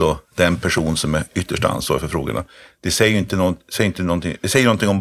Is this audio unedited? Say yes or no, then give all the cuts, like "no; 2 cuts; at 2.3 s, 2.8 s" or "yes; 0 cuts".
yes; 0 cuts